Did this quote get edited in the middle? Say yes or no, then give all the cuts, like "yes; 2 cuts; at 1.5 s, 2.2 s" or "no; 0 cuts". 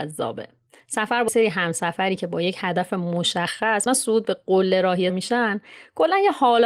yes; 3 cuts; at 1.3 s, 3.9 s, 5.1 s